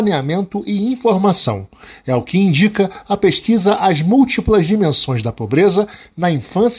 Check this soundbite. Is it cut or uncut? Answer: uncut